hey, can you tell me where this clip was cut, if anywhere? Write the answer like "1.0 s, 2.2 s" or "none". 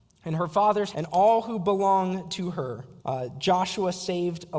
0.9 s, 3.0 s